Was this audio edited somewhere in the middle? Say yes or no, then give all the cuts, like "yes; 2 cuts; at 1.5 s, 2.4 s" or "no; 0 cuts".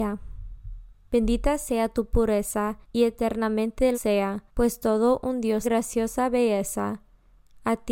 yes; 4 cuts; at 2.8 s, 3.9 s, 4.5 s, 5.6 s